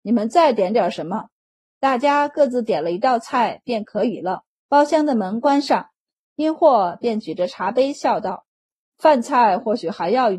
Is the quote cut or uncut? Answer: cut